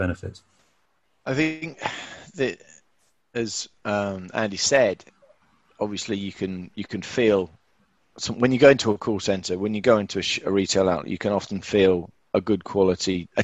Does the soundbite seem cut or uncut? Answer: uncut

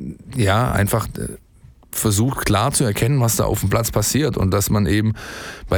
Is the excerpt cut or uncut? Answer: uncut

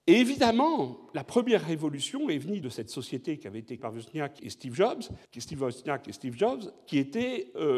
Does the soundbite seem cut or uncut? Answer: cut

